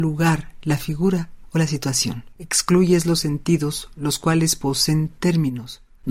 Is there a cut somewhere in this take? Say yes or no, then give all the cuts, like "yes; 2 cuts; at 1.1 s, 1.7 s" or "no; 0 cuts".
yes; 1 cut; at 2.3 s